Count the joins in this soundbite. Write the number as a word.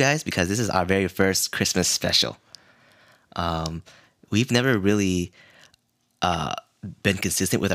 zero